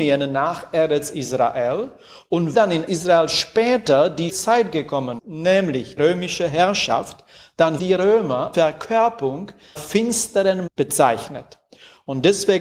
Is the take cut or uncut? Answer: cut